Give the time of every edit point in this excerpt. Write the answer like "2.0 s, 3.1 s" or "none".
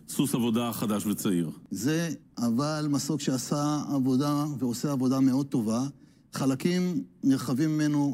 2.2 s